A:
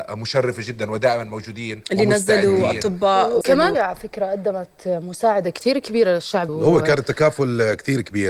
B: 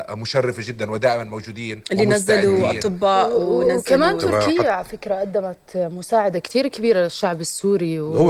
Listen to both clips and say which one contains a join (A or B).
A